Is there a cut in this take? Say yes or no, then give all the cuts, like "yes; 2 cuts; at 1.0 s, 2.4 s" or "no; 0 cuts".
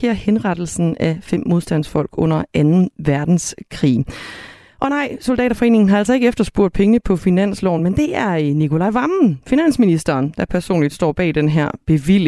no; 0 cuts